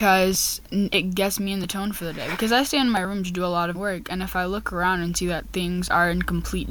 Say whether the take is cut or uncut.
cut